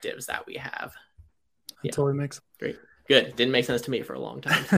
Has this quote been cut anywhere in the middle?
yes; 2 cuts; at 1.7 s, 2.4 s

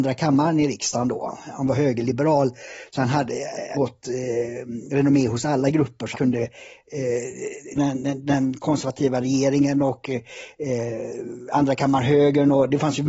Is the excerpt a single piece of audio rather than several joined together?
no; 3 cuts; at 3.7 s, 6.1 s, 7.7 s

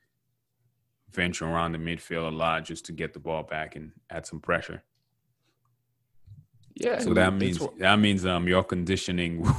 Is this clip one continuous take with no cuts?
yes; 0 cuts

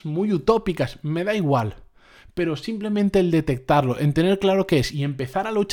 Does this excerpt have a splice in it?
no; 0 cuts

